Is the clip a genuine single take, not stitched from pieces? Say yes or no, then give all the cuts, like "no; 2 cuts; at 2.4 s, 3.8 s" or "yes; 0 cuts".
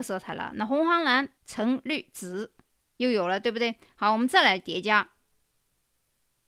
no; 2 cuts; at 1.4 s, 2.7 s